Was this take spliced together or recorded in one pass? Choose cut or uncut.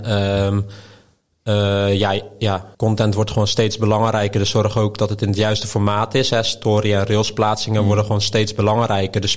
cut